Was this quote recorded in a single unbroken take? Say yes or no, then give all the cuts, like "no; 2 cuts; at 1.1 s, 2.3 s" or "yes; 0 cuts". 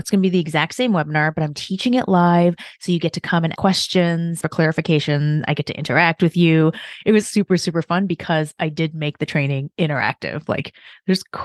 no; 3 cuts; at 3.6 s, 4.4 s, 7.2 s